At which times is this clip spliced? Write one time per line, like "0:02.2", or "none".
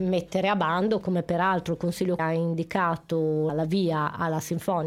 0:01.0
0:02.2
0:03.5